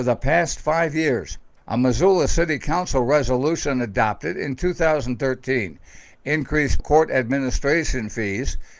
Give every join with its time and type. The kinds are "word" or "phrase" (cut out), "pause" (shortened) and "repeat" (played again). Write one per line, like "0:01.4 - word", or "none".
0:01.6 - pause
0:06.8 - word